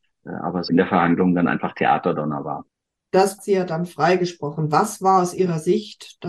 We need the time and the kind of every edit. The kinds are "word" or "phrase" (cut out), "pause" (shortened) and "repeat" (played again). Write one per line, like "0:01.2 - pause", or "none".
0:03.4 - phrase